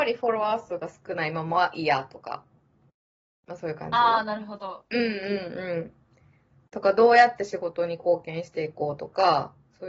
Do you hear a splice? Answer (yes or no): no